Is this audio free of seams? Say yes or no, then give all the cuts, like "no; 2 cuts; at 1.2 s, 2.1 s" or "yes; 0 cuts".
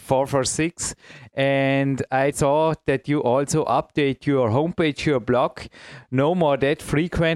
no; 1 cut; at 2.3 s